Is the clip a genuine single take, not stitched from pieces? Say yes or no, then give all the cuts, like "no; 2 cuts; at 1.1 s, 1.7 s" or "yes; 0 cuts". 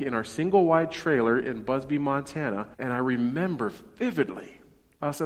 no; 1 cut; at 2.7 s